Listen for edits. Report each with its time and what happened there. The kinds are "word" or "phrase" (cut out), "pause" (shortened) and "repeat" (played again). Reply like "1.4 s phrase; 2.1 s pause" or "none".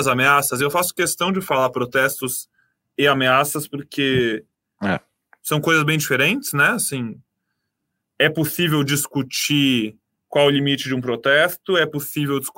none